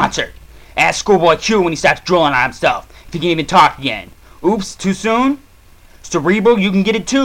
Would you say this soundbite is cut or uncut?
uncut